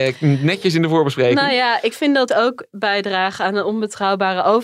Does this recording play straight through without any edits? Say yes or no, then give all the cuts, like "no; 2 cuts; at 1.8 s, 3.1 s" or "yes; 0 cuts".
no; 2 cuts; at 1.9 s, 2.3 s